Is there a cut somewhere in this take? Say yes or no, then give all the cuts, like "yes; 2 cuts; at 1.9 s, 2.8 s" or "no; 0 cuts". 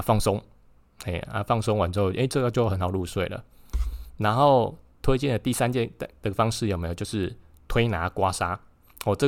no; 0 cuts